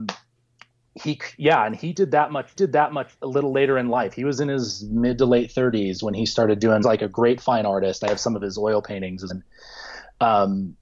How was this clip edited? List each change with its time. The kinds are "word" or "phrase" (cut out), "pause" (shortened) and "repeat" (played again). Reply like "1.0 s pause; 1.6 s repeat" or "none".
2.6 s repeat; 6.8 s phrase; 9.3 s word